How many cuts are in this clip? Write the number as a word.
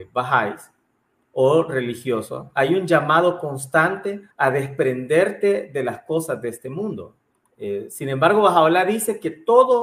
two